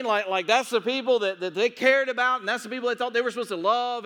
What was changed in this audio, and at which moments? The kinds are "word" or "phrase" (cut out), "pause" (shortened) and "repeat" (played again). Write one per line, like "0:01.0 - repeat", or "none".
none

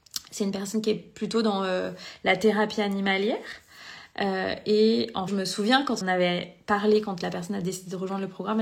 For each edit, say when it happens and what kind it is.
0:05.3 - word
0:06.0 - word

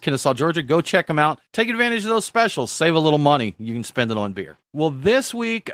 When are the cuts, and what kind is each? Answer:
0:01.5 - pause
0:04.6 - pause

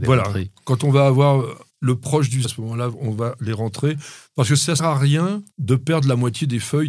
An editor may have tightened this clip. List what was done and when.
0:01.7 - pause
0:02.4 - word
0:04.8 - word
0:05.5 - pause

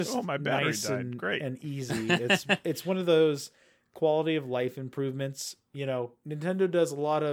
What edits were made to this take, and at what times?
none

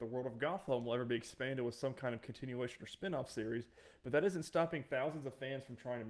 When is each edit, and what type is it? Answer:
none

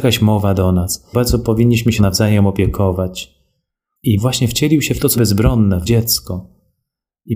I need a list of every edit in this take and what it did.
0:01.1 - word
0:02.0 - word
0:04.2 - word
0:05.1 - word
0:05.8 - word

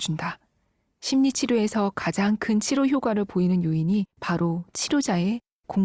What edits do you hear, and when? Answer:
0:04.1 - pause

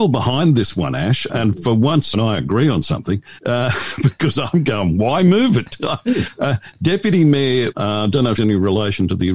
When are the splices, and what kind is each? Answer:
0:01.3 - word
0:02.1 - word
0:03.4 - pause
0:07.7 - phrase
0:08.4 - word

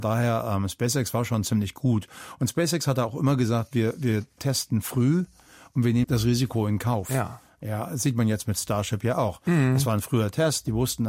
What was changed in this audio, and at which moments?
0:06.0 - word

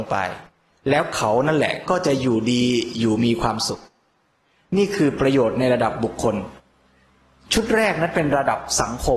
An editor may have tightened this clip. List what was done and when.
none

